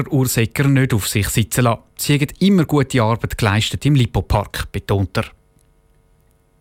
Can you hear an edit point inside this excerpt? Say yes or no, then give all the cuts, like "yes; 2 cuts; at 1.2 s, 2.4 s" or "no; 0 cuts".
no; 0 cuts